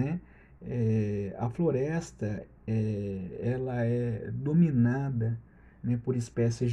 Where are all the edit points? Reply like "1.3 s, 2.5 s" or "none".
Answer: none